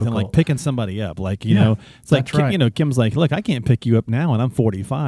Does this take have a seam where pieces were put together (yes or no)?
no